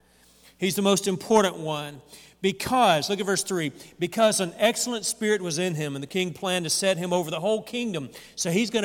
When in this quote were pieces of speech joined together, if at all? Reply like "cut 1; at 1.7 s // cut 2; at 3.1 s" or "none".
none